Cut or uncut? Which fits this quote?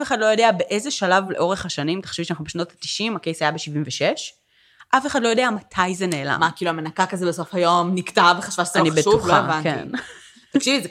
uncut